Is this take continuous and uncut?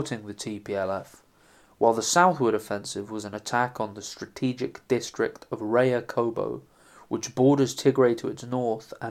yes; 0 cuts

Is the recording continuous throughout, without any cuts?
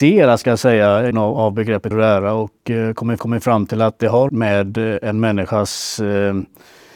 no; 4 cuts; at 1.1 s, 1.9 s, 3.2 s, 4.3 s

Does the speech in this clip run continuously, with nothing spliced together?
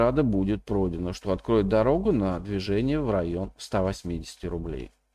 yes; 0 cuts

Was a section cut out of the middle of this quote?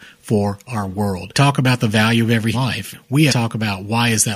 yes; 2 cuts; at 2.5 s, 3.3 s

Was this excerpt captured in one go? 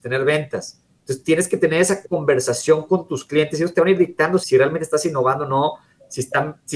no; 1 cut; at 4.4 s

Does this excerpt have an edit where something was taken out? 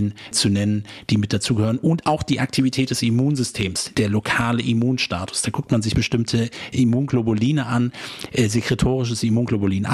no; 0 cuts

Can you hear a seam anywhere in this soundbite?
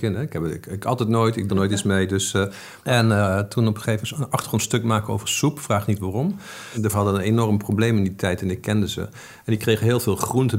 yes; 3 cuts; at 1.5 s, 4.0 s, 6.9 s

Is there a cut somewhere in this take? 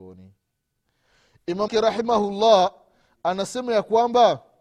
yes; 1 cut; at 1.7 s

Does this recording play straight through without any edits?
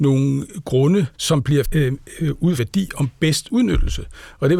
no; 4 cuts; at 1.1 s, 1.6 s, 2.6 s, 3.5 s

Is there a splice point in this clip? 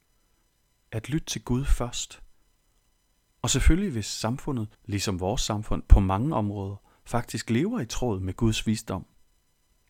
yes; 1 cut; at 4.7 s

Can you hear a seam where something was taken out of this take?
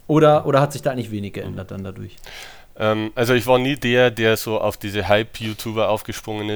no; 0 cuts

